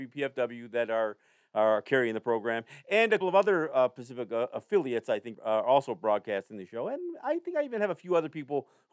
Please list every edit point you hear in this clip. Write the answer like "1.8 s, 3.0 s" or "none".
3.2 s, 5.3 s